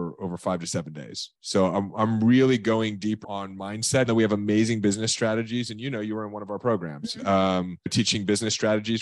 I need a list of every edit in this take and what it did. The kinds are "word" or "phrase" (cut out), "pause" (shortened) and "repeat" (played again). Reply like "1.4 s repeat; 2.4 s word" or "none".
1.4 s pause; 3.2 s word; 4.1 s word